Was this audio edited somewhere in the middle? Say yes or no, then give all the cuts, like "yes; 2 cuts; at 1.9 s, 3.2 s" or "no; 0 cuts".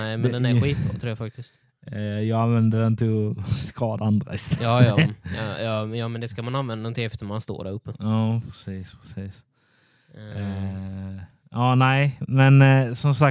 no; 0 cuts